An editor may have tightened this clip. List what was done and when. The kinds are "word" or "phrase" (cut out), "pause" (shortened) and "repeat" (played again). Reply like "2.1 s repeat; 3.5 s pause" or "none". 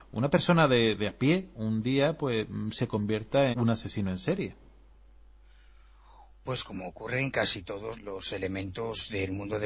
3.5 s word; 8.0 s word